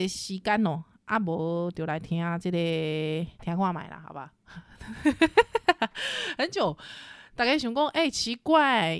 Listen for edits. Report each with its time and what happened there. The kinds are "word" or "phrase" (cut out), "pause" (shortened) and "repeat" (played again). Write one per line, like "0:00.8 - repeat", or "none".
0:03.3 - pause